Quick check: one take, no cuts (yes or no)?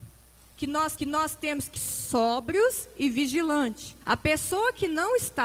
no